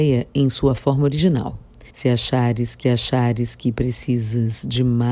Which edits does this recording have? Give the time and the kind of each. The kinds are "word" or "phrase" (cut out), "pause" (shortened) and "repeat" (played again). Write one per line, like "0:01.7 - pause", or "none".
0:01.9 - pause
0:02.8 - repeat